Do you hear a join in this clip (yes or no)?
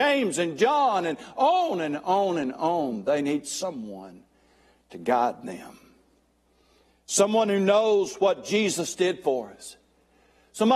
no